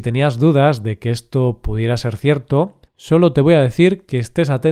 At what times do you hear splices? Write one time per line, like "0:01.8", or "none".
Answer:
0:02.9